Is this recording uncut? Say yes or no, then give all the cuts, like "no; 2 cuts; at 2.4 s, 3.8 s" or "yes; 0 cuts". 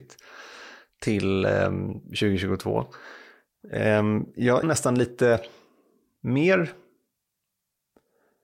no; 1 cut; at 4.6 s